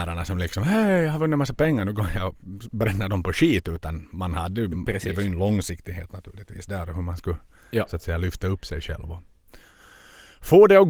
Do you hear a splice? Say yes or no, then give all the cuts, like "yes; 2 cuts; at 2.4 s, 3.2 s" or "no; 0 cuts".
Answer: no; 0 cuts